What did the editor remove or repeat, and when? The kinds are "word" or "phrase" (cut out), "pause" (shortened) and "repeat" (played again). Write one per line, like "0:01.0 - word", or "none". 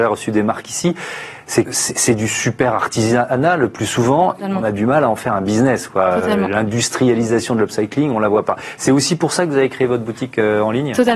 0:01.6 - word
0:04.4 - word